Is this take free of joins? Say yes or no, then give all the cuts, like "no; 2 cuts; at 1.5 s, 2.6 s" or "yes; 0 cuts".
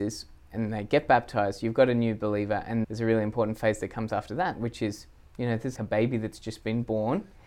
no; 2 cuts; at 2.8 s, 5.8 s